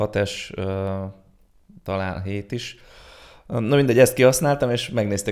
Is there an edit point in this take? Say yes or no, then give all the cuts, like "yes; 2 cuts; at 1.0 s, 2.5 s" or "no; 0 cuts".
no; 0 cuts